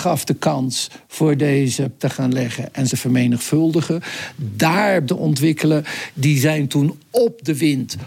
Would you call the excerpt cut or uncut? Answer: cut